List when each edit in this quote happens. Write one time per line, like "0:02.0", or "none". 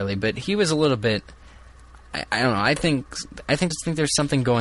0:02.3
0:03.7